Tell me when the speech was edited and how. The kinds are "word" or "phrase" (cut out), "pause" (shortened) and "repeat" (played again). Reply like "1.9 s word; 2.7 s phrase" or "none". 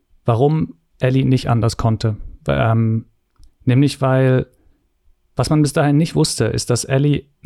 none